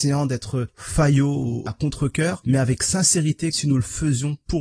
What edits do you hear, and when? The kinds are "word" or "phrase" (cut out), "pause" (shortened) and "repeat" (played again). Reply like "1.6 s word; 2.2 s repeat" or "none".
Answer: 1.7 s phrase; 3.5 s word

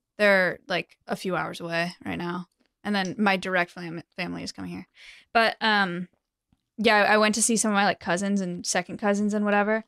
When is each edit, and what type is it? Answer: 1.0 s pause

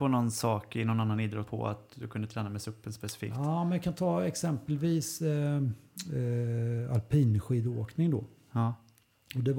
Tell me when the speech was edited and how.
1.5 s phrase

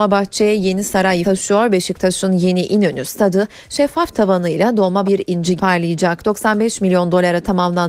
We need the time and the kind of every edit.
1.2 s word; 5.0 s word; 5.6 s word

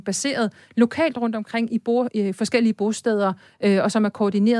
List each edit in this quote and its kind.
none

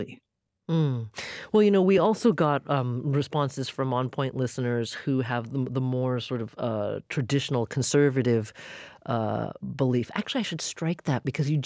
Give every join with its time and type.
none

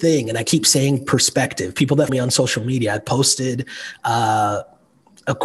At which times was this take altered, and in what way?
2.1 s word

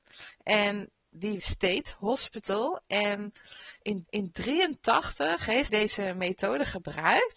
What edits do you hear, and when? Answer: 1.4 s phrase; 4.1 s repeat; 5.7 s word

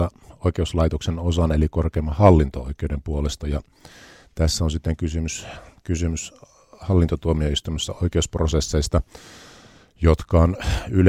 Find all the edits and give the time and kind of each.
none

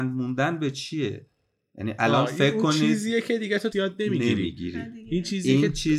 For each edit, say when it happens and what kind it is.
3.7 s word

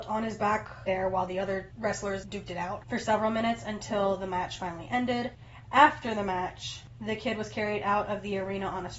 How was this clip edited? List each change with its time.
none

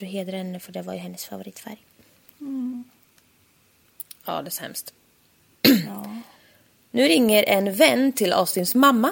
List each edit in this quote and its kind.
none

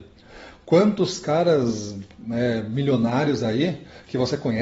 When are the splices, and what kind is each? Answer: none

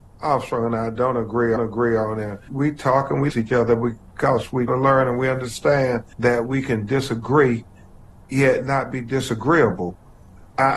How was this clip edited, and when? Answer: 1.6 s repeat; 2.5 s word; 3.3 s word; 4.7 s word; 6.1 s pause

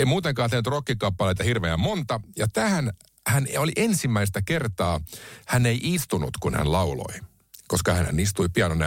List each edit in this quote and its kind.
none

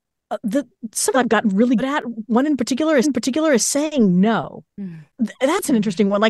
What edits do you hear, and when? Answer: 1.1 s phrase; 1.8 s word; 3.0 s repeat; 4.7 s pause

